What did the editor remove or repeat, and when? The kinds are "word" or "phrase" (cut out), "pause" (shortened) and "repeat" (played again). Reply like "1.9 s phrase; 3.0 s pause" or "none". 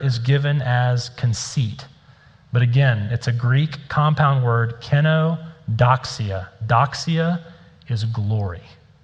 none